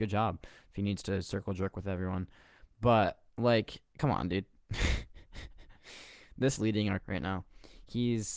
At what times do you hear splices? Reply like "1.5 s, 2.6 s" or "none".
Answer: 3.3 s, 6.6 s, 7.0 s